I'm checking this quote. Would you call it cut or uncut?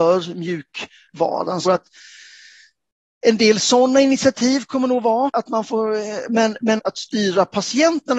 cut